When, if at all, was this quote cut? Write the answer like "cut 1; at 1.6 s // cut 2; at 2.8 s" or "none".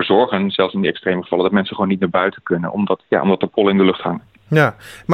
cut 1; at 3.0 s